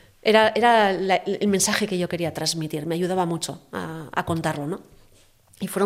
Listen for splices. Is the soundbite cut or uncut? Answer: uncut